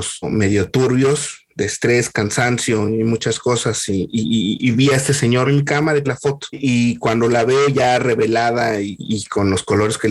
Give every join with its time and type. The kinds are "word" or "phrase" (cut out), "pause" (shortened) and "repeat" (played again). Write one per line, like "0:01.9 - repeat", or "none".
0:05.4 - phrase
0:06.0 - word